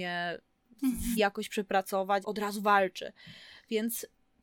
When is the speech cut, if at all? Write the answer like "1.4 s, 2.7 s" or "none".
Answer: 1.2 s, 2.2 s